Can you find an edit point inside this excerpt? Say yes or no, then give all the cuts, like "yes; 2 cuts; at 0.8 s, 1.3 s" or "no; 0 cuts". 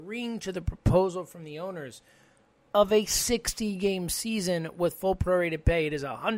no; 0 cuts